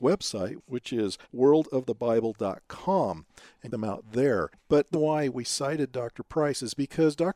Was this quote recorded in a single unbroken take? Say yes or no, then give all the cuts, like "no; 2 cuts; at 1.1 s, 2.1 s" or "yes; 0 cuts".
no; 3 cuts; at 1.2 s, 3.7 s, 4.9 s